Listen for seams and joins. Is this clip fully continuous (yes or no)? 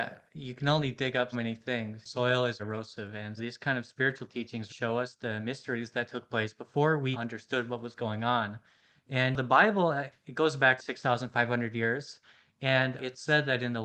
no